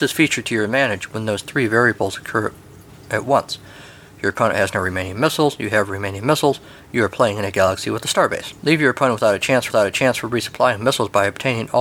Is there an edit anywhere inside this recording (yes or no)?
yes